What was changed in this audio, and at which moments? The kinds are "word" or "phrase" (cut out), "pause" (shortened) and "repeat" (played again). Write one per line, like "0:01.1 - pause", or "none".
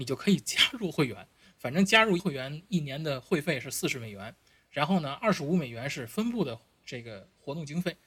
0:02.2 - word